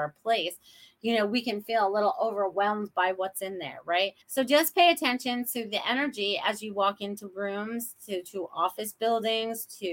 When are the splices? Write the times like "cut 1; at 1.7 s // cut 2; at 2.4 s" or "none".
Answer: cut 1; at 4.2 s